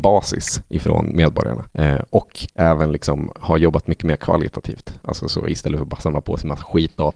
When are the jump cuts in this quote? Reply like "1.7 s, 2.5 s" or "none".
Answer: 1.7 s